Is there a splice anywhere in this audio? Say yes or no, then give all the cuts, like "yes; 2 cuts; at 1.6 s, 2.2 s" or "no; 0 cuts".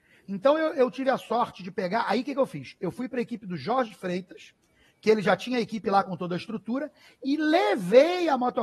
no; 0 cuts